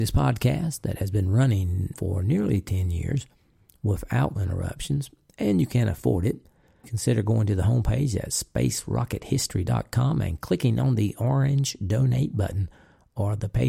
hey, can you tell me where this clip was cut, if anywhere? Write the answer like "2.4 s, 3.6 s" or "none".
1.9 s, 4.4 s, 6.8 s